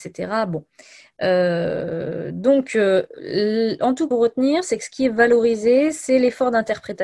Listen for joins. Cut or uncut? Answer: cut